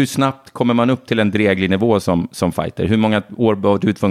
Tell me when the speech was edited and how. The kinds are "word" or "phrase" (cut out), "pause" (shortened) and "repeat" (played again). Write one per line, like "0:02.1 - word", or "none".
none